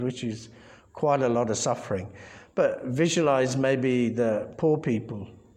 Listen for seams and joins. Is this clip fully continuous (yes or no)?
yes